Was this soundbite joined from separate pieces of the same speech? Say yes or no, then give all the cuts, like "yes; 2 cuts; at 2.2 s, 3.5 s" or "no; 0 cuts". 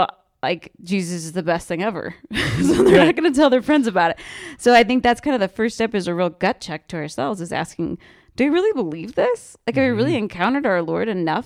no; 0 cuts